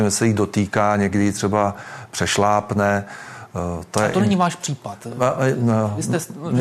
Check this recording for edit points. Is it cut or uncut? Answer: uncut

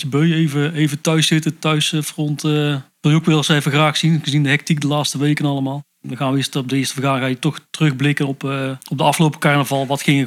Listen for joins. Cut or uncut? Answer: cut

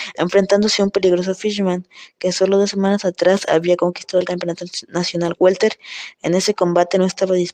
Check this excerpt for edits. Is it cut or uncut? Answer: uncut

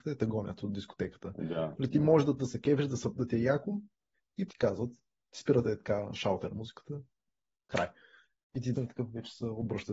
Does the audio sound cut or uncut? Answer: cut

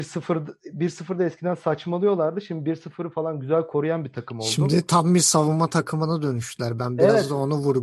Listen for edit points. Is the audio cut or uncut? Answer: uncut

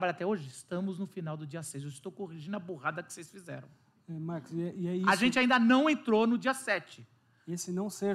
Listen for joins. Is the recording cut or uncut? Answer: uncut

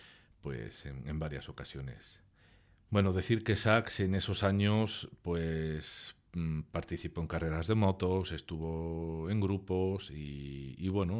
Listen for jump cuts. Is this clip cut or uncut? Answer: cut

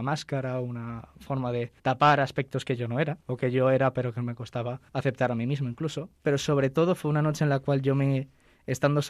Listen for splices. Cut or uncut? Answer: cut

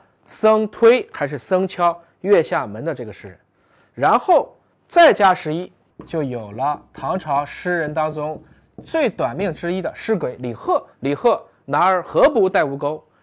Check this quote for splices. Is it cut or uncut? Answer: cut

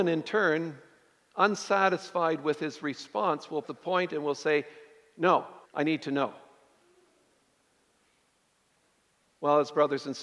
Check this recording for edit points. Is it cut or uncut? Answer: cut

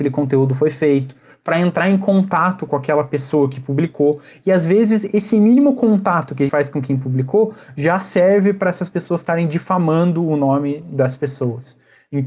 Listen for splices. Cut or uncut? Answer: cut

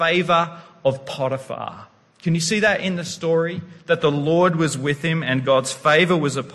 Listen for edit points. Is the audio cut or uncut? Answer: uncut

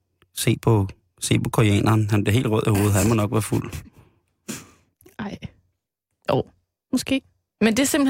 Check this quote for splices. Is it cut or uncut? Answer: uncut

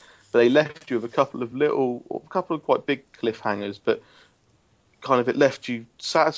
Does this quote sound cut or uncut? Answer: uncut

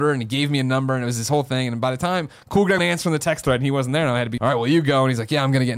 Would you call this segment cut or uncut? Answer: cut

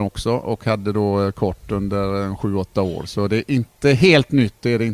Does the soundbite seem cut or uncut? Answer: uncut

